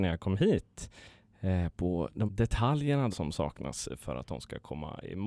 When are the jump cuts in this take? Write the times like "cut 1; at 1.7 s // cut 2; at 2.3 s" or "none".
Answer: cut 1; at 2.3 s // cut 2; at 3.1 s